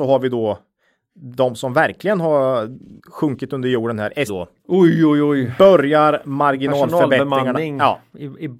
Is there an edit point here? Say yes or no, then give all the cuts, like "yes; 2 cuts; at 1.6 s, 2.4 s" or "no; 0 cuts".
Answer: yes; 2 cuts; at 3.0 s, 4.3 s